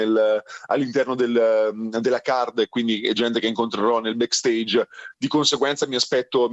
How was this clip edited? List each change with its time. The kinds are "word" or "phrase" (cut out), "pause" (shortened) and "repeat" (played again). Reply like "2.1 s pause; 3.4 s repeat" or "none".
none

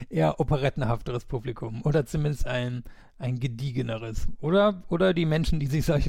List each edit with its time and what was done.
none

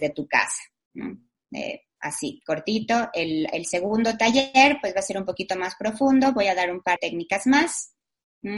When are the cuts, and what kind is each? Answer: 7.0 s word

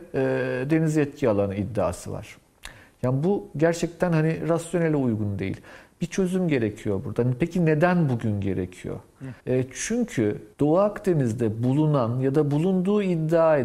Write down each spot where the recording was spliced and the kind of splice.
9.4 s pause; 10.5 s pause

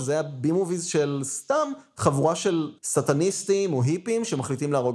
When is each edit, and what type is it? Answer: 2.8 s pause

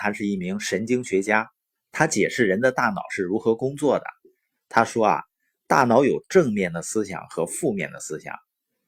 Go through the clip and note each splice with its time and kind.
none

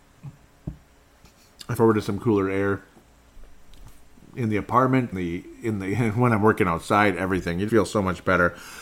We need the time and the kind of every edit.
1.7 s word; 5.1 s word; 7.7 s word

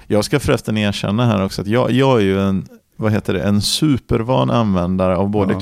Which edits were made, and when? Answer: none

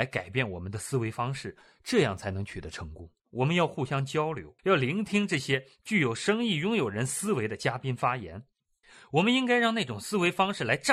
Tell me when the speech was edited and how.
3.2 s pause; 4.6 s pause; 8.8 s pause

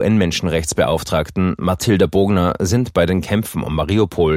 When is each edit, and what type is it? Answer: none

